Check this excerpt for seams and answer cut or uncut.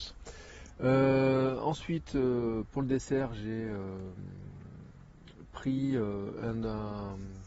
uncut